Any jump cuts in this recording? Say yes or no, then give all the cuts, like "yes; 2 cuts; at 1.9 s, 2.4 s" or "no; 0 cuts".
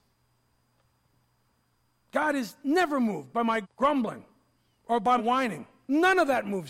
yes; 2 cuts; at 3.6 s, 5.2 s